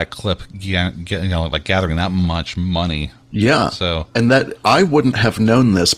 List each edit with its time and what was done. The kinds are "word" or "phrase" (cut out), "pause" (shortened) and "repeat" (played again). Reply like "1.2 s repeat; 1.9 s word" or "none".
3.2 s pause

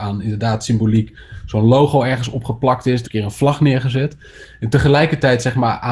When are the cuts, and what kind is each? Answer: 3.1 s phrase

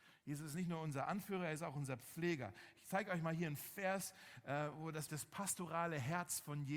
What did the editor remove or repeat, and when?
5.1 s word

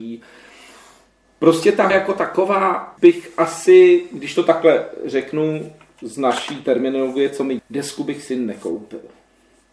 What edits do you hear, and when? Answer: 1.9 s word; 3.0 s word; 7.6 s word

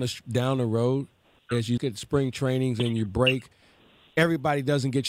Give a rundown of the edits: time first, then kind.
1.8 s word

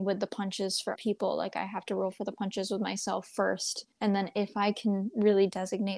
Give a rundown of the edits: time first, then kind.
1.0 s word; 3.9 s pause

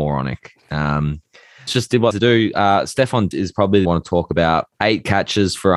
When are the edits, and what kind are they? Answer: 1.7 s phrase; 2.1 s phrase; 3.3 s word; 3.8 s phrase; 4.7 s pause

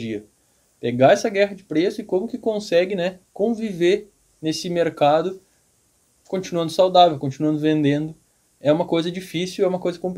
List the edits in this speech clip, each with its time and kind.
none

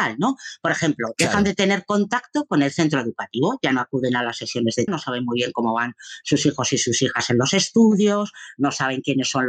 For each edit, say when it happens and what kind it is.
4.9 s word

